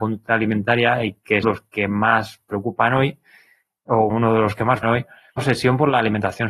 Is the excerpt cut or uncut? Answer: cut